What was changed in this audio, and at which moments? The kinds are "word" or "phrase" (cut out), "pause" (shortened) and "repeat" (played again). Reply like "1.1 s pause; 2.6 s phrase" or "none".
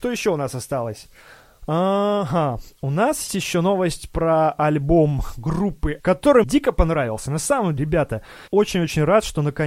3.3 s word; 6.0 s word; 6.4 s word; 7.8 s word; 8.5 s word